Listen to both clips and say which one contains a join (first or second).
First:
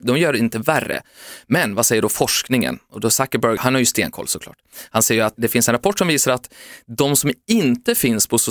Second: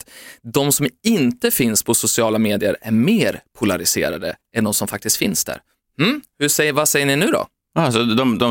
first